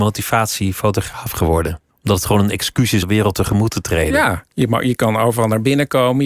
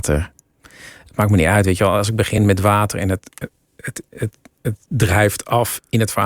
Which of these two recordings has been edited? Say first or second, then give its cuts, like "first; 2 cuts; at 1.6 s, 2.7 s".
first; 2 cuts; at 1.9 s, 3.0 s